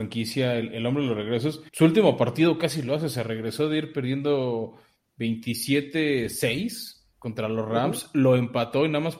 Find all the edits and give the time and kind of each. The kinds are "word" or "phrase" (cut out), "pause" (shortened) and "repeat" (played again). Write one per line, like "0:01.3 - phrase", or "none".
0:01.7 - pause
0:07.1 - pause